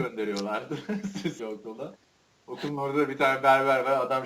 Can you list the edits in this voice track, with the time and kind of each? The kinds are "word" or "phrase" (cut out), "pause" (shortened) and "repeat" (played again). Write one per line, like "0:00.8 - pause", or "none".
0:01.4 - word